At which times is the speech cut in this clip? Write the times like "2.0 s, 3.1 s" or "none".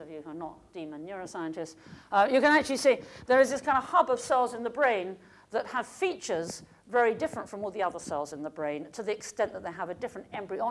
none